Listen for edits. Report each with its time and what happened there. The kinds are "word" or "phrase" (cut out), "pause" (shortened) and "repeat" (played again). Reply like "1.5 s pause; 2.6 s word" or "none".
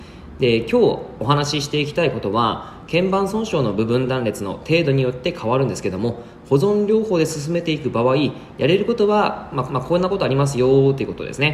9.7 s repeat

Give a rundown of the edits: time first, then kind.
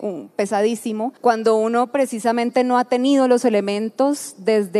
1.2 s pause

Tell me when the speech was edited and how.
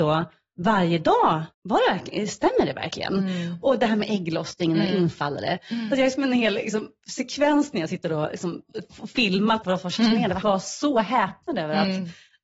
1.5 s pause; 9.6 s phrase; 10.4 s word

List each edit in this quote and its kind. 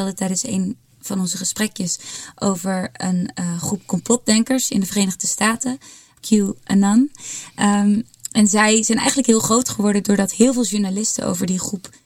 none

